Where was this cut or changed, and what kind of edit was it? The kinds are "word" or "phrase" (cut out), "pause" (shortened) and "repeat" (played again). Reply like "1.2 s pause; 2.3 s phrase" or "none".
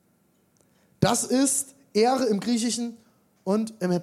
none

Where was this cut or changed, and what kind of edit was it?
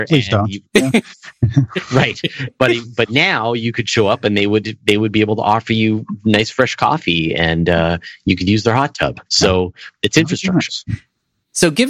9.3 s pause

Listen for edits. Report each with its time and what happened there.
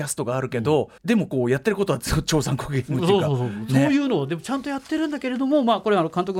1.0 s pause

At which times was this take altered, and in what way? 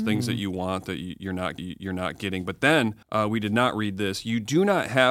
1.6 s repeat; 3.0 s pause

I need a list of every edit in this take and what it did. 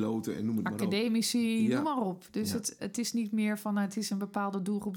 2.8 s word

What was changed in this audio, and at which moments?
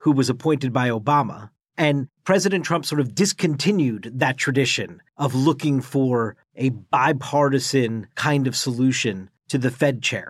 8.1 s pause

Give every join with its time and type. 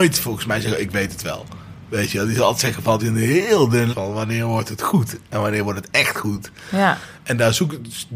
3.0 s phrase; 3.9 s word

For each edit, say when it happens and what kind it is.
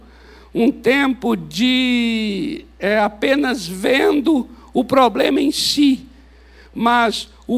none

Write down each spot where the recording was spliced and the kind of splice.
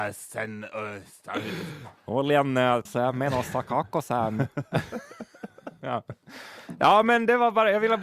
2.0 s pause; 2.9 s word

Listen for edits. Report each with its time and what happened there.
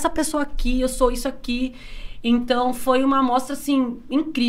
none

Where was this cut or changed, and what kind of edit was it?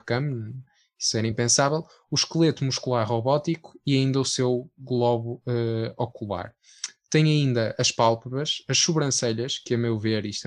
none

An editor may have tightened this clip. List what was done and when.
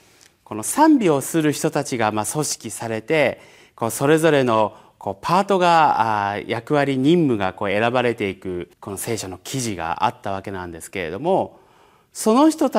8.7 s pause

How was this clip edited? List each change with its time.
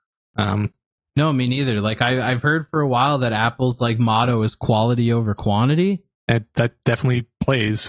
none

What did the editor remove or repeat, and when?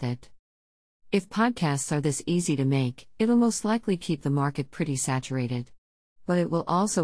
none

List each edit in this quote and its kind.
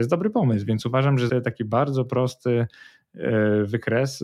1.3 s word

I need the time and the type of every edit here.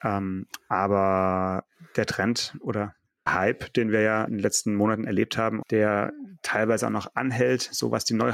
3.3 s word; 4.3 s word; 5.6 s word

